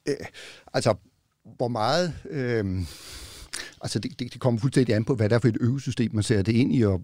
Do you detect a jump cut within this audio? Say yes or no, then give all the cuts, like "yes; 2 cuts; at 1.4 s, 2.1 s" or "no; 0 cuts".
no; 0 cuts